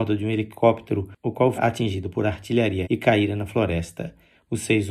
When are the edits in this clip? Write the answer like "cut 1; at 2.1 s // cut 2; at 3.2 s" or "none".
cut 1; at 1.5 s // cut 2; at 2.8 s